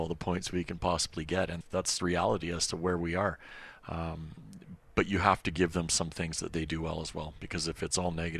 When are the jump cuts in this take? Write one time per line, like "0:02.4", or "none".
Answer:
0:01.6
0:02.0
0:04.8